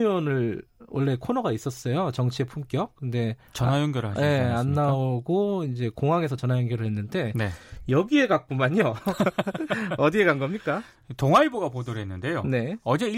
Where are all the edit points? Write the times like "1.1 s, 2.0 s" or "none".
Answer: none